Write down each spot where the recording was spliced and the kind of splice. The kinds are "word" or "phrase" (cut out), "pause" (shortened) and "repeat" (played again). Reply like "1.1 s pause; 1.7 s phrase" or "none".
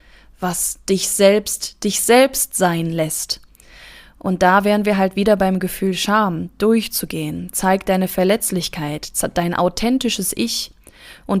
none